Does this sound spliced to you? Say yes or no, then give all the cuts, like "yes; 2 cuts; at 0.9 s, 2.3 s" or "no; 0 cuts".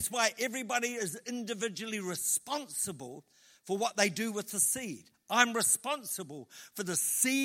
no; 0 cuts